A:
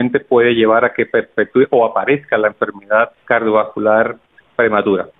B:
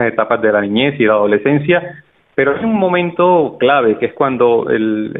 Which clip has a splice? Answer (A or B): A